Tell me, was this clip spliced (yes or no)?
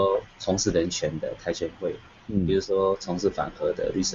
no